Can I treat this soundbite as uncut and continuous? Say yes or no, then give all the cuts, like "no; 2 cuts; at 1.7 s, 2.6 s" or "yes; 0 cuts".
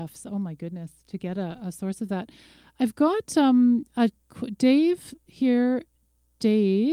yes; 0 cuts